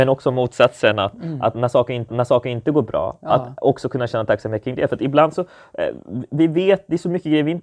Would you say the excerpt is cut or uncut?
cut